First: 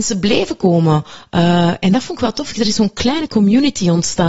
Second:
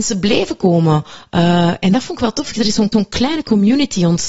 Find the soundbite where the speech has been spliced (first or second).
second